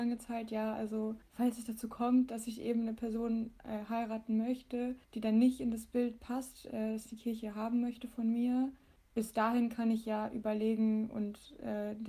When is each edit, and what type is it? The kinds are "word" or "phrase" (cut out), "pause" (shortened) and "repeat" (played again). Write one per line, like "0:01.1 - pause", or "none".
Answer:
0:01.2 - pause
0:05.0 - pause
0:09.0 - pause